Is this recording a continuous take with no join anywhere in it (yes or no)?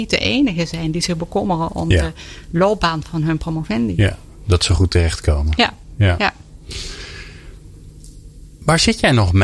yes